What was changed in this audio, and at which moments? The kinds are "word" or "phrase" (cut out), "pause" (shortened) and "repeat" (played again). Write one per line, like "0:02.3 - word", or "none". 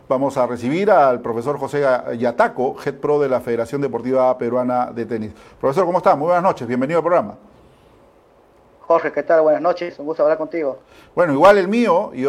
none